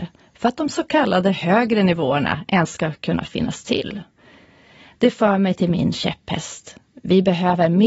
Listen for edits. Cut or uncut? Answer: uncut